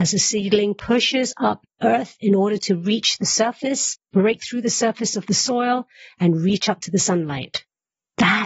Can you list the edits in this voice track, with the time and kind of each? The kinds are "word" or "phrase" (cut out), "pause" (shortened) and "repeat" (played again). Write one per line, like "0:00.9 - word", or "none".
none